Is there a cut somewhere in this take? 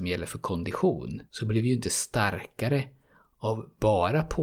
yes; 1 cut; at 1.3 s

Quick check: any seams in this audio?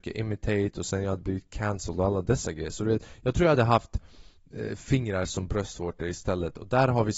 no; 0 cuts

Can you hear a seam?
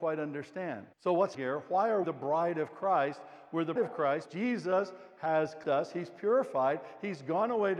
yes; 6 cuts; at 0.9 s, 1.3 s, 2.0 s, 3.8 s, 4.3 s, 5.6 s

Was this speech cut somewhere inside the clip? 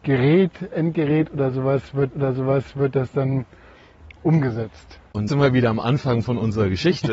yes; 2 cuts; at 2.1 s, 5.3 s

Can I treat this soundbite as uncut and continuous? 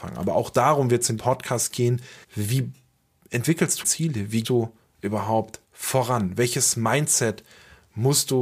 no; 5 cuts; at 1.2 s, 2.2 s, 3.8 s, 4.4 s, 5.6 s

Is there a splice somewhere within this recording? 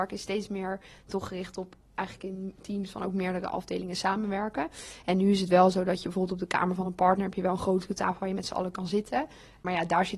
no; 0 cuts

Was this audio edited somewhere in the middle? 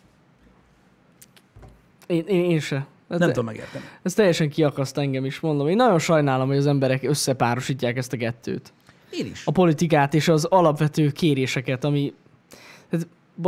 no; 0 cuts

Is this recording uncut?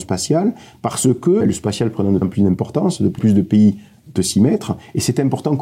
no; 4 cuts; at 1.4 s, 2.2 s, 3.2 s, 4.2 s

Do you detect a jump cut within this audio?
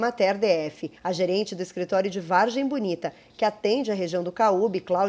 yes; 1 cut; at 1.0 s

